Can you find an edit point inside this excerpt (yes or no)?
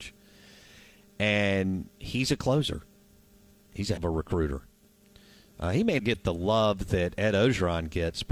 yes